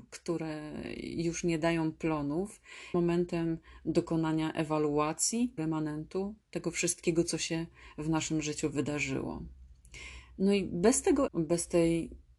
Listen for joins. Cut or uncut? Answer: cut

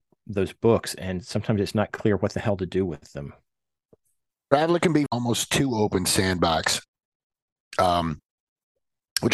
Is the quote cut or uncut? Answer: cut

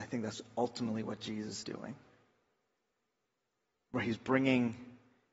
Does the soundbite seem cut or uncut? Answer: cut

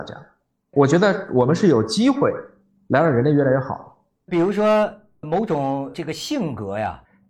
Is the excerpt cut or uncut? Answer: uncut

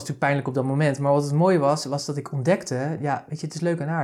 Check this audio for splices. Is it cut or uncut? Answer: uncut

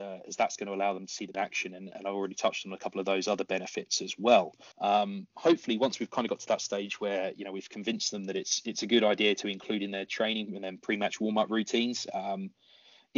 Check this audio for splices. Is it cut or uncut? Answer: cut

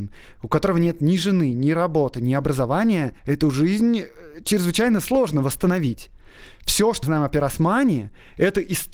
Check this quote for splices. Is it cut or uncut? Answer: cut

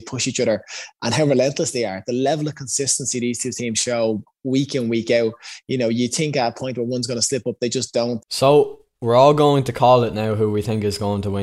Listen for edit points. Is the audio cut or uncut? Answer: uncut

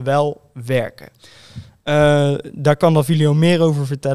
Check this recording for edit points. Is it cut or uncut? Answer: uncut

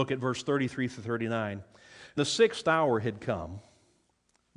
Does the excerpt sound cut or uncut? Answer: cut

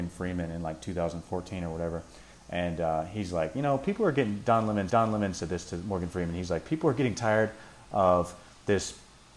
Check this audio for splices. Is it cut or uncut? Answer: cut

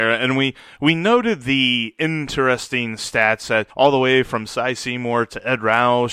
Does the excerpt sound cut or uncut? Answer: cut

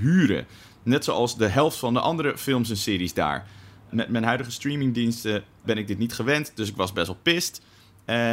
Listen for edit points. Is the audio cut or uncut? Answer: uncut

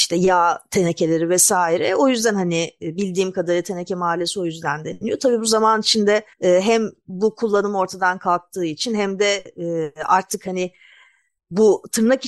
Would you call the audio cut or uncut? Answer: cut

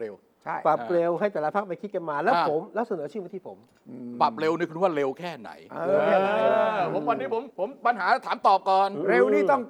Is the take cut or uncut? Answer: cut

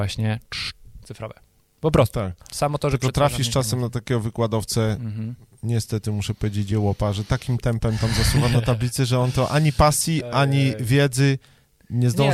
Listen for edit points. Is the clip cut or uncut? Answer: uncut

